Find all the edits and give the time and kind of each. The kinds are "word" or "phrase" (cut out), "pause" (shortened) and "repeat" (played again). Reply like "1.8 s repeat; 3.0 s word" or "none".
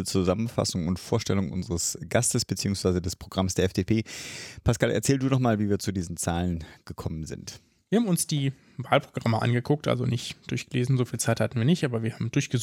none